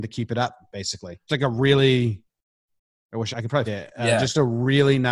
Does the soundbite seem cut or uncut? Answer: cut